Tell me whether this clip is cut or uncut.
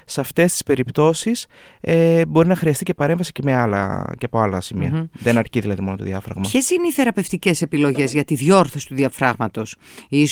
uncut